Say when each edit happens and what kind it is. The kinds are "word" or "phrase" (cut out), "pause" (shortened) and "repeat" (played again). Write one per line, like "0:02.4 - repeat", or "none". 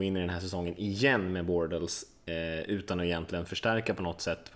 none